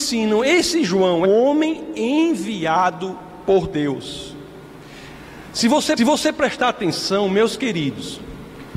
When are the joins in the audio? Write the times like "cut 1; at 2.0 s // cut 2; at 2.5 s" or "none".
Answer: cut 1; at 1.2 s // cut 2; at 6.0 s